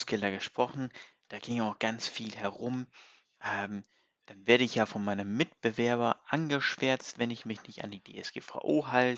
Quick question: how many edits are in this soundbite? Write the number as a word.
zero